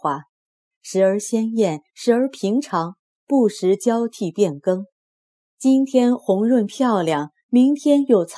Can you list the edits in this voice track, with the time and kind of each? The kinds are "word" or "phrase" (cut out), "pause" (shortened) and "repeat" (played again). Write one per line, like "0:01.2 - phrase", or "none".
none